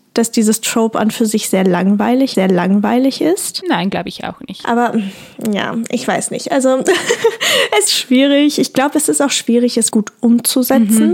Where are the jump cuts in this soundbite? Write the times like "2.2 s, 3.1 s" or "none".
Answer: 2.3 s, 7.9 s, 9.9 s